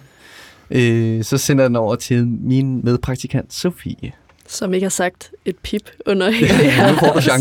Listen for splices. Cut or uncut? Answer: uncut